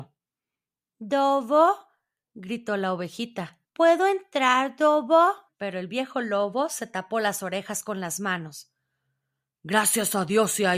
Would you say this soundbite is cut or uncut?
cut